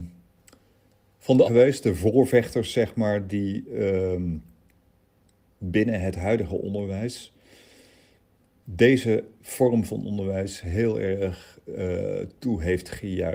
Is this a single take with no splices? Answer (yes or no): no